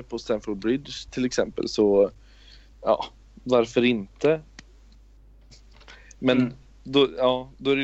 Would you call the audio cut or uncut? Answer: uncut